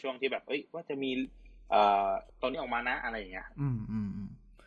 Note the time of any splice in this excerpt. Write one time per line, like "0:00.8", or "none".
0:02.3